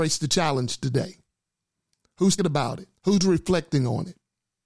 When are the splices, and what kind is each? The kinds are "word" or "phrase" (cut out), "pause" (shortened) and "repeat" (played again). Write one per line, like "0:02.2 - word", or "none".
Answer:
0:02.4 - word
0:03.0 - pause